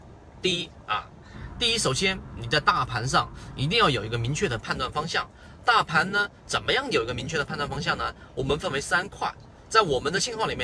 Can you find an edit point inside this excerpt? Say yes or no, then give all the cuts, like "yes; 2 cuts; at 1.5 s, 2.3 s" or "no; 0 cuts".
no; 0 cuts